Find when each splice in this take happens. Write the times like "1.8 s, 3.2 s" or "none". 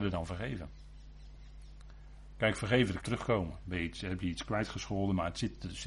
3.0 s